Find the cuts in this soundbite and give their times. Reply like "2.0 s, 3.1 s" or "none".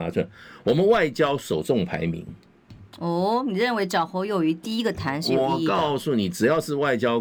none